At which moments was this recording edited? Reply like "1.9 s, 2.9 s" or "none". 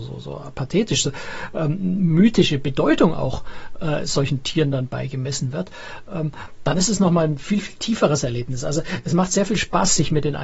none